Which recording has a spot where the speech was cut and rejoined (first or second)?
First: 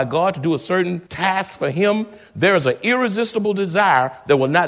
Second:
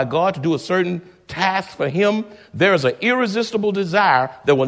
first